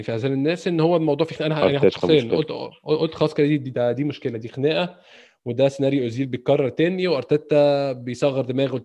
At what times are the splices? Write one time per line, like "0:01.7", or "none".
none